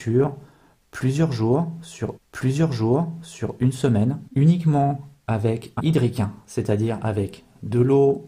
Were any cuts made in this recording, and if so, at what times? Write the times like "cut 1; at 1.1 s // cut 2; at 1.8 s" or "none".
cut 1; at 2.2 s // cut 2; at 4.3 s // cut 3; at 5.8 s